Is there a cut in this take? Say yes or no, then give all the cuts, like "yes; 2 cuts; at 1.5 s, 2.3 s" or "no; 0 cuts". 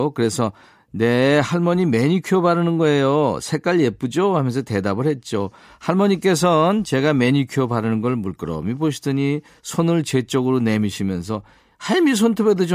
no; 0 cuts